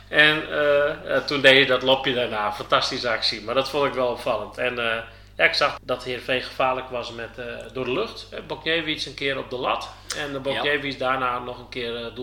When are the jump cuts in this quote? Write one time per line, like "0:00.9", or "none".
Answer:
0:05.8